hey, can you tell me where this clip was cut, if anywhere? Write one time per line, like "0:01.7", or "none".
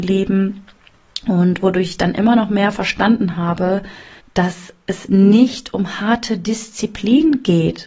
0:04.2